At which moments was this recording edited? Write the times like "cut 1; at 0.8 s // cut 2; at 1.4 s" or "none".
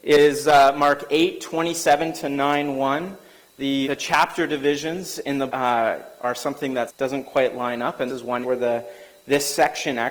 cut 1; at 3.8 s // cut 2; at 5.5 s // cut 3; at 6.9 s // cut 4; at 8.1 s // cut 5; at 8.4 s